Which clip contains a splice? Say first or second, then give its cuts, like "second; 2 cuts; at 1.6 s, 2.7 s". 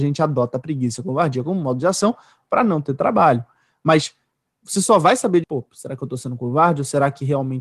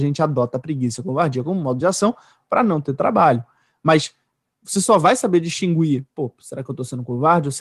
first; 1 cut; at 5.4 s